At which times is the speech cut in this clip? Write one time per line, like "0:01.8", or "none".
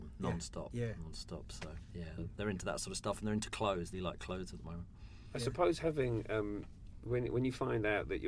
0:02.2
0:03.9